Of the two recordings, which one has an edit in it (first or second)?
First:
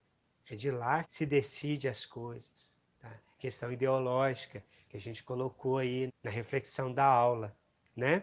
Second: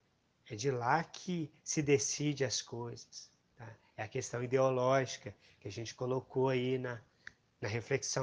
first